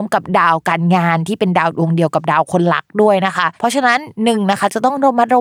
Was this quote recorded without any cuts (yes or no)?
no